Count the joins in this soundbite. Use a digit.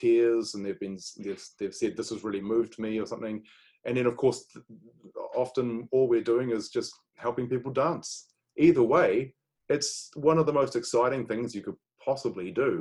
0